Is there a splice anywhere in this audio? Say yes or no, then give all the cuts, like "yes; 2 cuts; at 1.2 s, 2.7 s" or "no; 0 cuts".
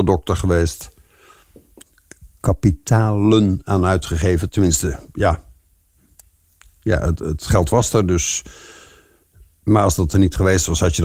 no; 0 cuts